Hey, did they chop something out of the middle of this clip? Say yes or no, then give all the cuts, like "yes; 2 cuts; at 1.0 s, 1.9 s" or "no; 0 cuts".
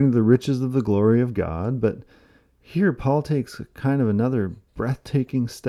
no; 0 cuts